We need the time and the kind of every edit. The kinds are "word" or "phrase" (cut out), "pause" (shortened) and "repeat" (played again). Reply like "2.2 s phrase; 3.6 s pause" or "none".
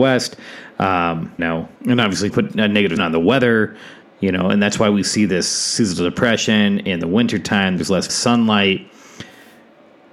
1.4 s word; 1.8 s pause; 2.3 s word; 3.0 s word; 4.0 s pause; 8.1 s phrase

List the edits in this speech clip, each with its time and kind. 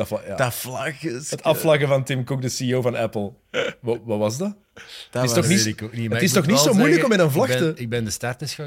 none

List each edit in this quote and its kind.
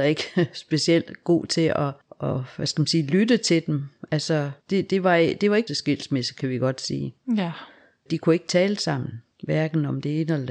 4.6 s pause; 5.7 s phrase; 8.1 s word

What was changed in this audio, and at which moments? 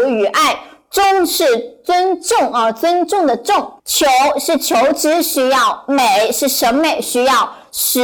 3.8 s pause

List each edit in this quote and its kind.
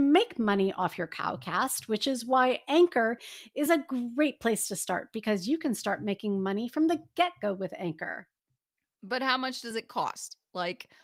none

